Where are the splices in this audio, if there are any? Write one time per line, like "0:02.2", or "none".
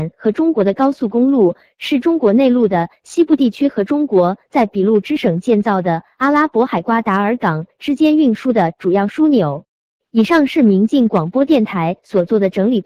none